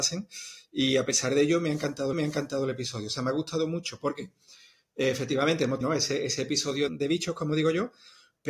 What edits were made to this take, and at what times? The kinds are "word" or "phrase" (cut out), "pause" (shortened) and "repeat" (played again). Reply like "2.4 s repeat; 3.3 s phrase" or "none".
2.1 s repeat; 5.8 s phrase; 6.9 s word